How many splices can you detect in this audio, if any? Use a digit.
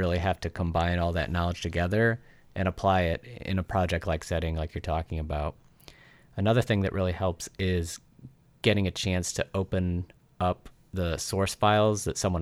0